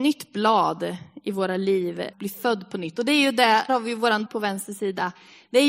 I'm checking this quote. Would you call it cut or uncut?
cut